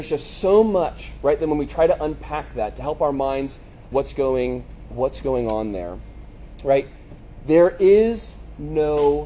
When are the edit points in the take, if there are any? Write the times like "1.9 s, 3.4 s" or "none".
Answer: 3.9 s, 4.9 s